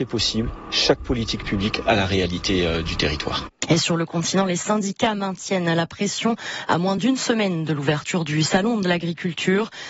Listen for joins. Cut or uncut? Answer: uncut